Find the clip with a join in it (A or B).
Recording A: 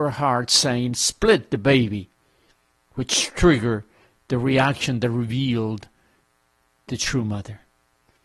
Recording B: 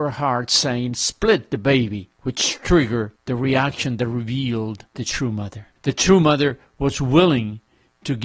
B